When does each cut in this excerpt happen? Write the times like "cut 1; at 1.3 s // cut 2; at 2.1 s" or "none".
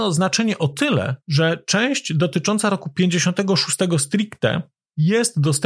cut 1; at 1.2 s